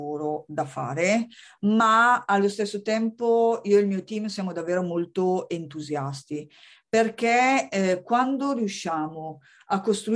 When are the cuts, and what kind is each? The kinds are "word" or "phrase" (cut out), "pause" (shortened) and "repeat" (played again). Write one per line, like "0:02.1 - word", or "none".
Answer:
none